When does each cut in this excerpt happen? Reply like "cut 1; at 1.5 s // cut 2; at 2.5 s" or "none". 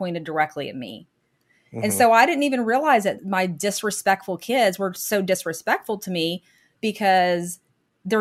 none

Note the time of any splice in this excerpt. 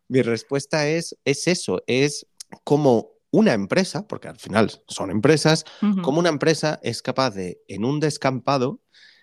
none

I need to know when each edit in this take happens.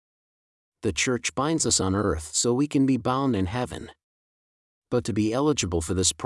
none

